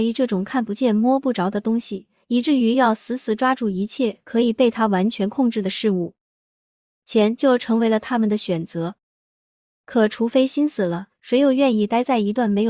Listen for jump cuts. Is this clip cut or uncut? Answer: uncut